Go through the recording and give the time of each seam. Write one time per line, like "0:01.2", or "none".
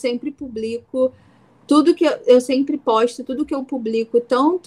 none